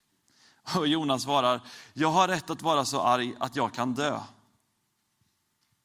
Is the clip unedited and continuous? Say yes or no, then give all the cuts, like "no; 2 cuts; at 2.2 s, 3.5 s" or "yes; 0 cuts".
yes; 0 cuts